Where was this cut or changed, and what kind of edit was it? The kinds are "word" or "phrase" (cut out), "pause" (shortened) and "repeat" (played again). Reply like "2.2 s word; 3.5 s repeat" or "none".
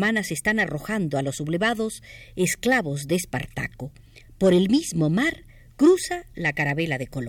none